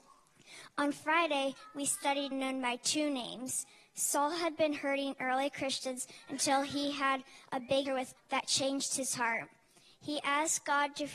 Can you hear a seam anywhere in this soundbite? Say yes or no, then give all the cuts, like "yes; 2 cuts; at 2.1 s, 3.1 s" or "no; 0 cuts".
yes; 3 cuts; at 2.3 s, 7.9 s, 8.2 s